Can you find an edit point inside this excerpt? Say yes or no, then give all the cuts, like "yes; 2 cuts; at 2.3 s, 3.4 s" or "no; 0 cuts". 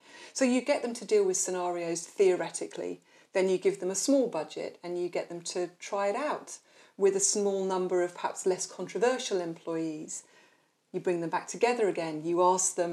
no; 0 cuts